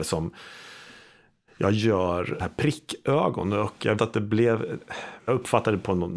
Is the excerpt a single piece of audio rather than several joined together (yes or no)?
no